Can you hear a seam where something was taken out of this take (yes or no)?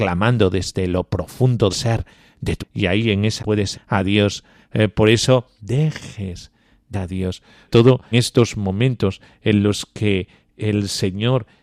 yes